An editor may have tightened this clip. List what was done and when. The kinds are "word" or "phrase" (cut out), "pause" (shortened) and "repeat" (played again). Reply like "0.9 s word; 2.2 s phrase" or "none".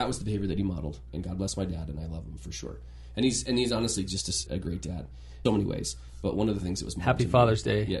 1.1 s word; 4.5 s word; 5.5 s word